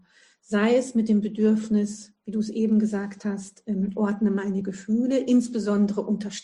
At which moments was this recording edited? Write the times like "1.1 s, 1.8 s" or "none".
none